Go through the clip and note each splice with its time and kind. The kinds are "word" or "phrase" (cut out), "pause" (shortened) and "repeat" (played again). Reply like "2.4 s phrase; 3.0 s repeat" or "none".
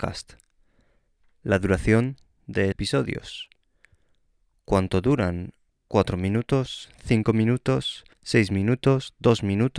2.7 s word; 5.7 s pause; 8.1 s pause